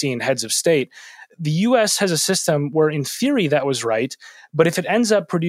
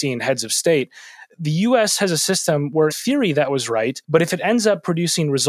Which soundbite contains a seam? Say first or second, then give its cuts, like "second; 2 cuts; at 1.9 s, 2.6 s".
second; 2 cuts; at 2.9 s, 4.0 s